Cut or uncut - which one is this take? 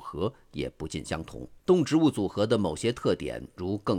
cut